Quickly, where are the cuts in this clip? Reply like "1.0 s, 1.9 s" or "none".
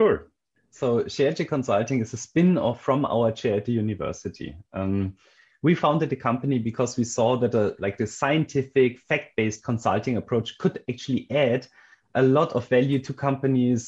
none